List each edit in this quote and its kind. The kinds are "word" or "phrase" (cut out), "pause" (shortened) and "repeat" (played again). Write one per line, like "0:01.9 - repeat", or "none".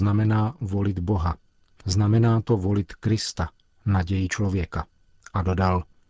none